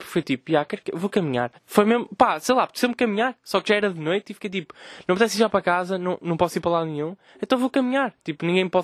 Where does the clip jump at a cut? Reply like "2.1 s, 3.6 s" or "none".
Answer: 1.6 s